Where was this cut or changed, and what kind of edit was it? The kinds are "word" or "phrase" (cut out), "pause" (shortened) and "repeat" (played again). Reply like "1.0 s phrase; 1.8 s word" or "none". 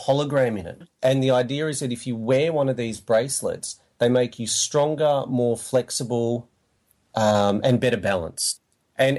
none